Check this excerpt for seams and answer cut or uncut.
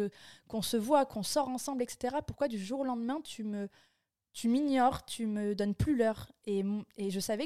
uncut